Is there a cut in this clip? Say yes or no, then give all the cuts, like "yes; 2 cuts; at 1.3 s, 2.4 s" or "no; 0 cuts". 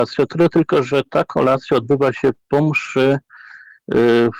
no; 0 cuts